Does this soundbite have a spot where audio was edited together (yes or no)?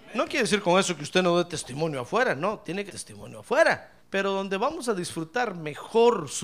yes